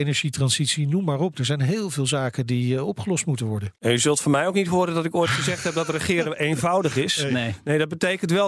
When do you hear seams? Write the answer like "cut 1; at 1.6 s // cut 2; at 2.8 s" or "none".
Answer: cut 1; at 3.8 s